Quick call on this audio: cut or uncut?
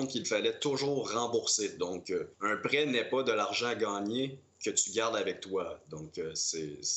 cut